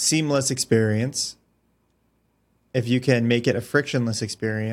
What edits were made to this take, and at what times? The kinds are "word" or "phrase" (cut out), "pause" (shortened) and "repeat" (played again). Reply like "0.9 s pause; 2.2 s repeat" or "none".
none